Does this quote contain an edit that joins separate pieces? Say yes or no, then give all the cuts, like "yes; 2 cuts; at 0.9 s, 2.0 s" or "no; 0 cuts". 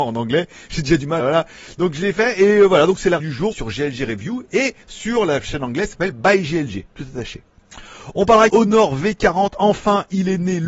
yes; 5 cuts; at 1.2 s, 3.2 s, 3.5 s, 4.8 s, 8.5 s